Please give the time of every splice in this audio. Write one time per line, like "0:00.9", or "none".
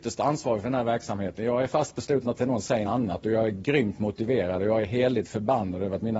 0:02.4
0:02.8